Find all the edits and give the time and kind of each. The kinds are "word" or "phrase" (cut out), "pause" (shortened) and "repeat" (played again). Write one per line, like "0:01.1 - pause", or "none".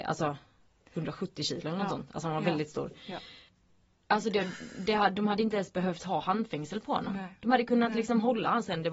none